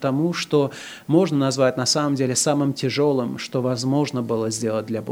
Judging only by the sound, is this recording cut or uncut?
uncut